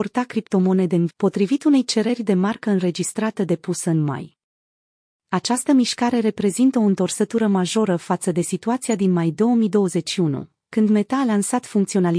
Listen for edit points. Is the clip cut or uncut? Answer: cut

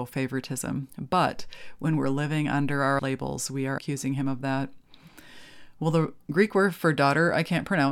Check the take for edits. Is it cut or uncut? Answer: cut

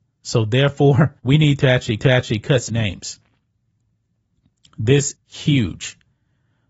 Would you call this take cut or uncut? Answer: cut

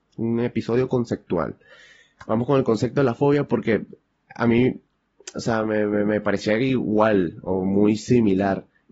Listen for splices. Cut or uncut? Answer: uncut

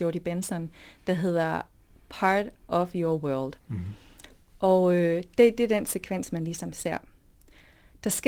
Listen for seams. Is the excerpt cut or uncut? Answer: uncut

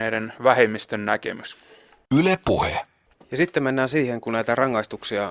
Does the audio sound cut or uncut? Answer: uncut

